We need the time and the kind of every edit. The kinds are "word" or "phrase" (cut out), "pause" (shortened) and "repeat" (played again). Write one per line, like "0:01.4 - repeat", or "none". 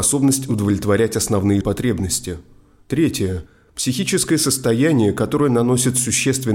0:01.6 - word
0:03.5 - pause